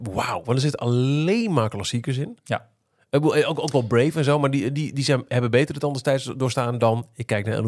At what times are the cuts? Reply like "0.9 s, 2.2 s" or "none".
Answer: none